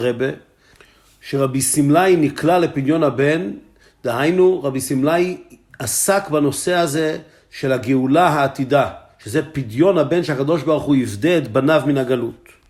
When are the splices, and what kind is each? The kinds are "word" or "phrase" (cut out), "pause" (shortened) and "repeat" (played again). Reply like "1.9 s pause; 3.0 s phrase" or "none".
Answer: none